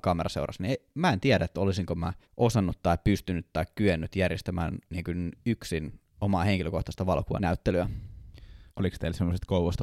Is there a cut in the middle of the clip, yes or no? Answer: yes